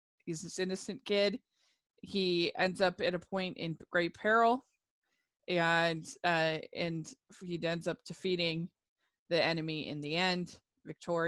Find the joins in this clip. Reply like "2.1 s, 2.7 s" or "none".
none